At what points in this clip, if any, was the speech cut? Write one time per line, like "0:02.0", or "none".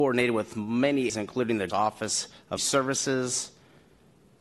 0:01.1
0:01.7
0:02.6